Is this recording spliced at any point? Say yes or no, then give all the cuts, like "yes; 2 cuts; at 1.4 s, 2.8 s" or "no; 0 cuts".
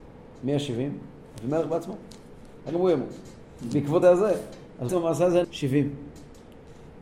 yes; 4 cuts; at 2.7 s, 4.0 s, 4.9 s, 5.4 s